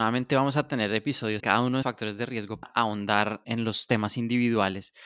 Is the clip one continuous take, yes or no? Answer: no